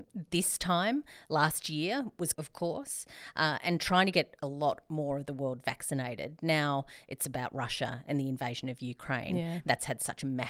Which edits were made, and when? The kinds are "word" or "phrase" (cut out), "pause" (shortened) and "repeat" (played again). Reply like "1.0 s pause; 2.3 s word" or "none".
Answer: 2.3 s word